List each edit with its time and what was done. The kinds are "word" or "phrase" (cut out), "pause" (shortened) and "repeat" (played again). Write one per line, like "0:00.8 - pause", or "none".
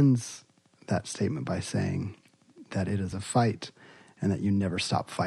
none